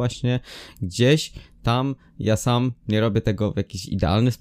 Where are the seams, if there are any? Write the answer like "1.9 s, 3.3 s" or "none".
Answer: none